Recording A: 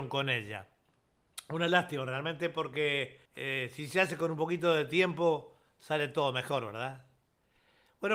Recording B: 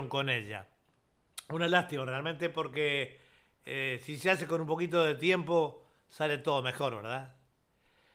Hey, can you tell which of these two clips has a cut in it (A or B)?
A